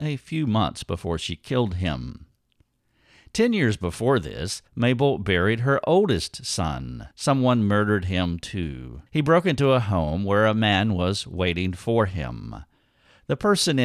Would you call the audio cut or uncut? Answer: cut